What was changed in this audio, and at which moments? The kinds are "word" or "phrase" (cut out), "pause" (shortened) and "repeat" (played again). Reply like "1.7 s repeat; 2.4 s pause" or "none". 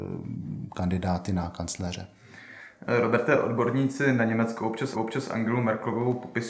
4.9 s repeat